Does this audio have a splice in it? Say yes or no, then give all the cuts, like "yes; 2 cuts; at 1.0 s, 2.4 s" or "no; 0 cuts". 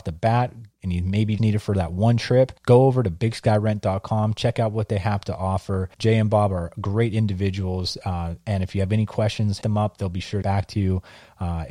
yes; 5 cuts; at 1.4 s, 2.6 s, 5.9 s, 9.6 s, 10.4 s